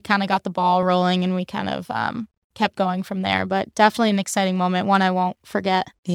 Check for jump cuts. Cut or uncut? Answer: uncut